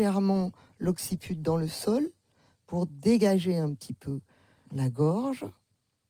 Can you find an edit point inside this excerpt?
no; 0 cuts

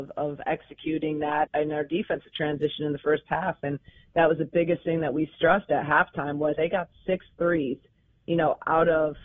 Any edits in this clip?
yes; 2 cuts; at 1.5 s, 6.6 s

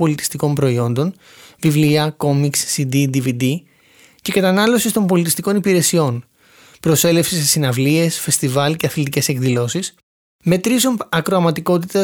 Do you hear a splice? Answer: no; 0 cuts

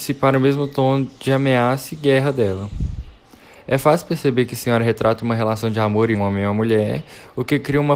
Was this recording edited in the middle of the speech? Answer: yes; 1 cut; at 6.1 s

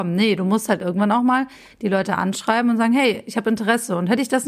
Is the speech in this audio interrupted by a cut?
no; 0 cuts

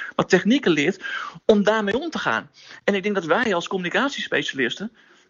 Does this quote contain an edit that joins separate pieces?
yes; 1 cut; at 1.4 s

